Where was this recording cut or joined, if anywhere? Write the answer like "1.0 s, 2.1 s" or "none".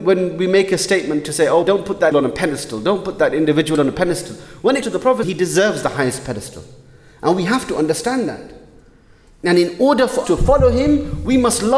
1.6 s, 2.1 s, 4.8 s, 5.2 s, 10.2 s